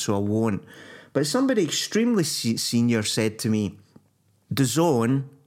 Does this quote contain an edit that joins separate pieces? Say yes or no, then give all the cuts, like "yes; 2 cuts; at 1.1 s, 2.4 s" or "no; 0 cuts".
no; 0 cuts